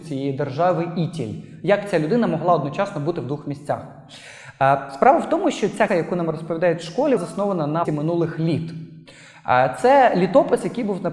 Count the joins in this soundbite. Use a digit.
3